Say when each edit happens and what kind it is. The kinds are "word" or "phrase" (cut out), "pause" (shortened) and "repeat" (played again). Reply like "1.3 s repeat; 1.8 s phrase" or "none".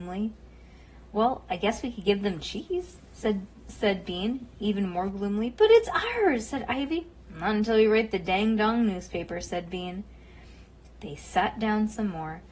none